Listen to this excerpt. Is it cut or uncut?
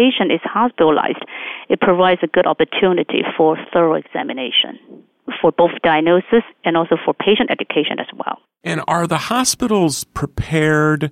cut